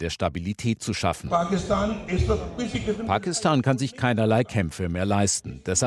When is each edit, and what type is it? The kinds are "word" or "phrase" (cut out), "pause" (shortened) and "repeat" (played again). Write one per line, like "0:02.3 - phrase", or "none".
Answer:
none